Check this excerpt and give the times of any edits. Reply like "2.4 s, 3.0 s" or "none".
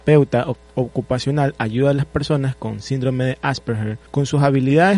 4.1 s